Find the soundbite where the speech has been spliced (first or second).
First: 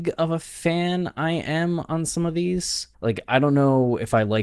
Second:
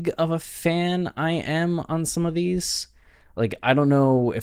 first